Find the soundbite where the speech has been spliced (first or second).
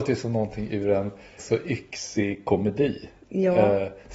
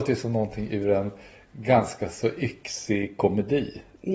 first